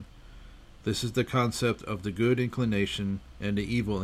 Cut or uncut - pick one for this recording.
uncut